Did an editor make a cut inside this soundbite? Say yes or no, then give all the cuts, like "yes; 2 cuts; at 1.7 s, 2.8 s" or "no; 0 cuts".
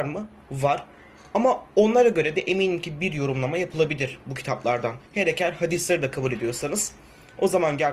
yes; 1 cut; at 5.1 s